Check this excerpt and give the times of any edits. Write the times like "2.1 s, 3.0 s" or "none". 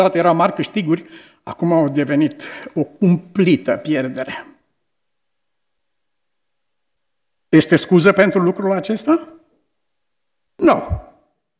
none